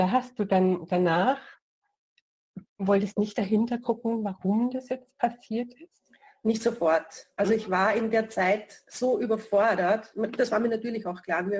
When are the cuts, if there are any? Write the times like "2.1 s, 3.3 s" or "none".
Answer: none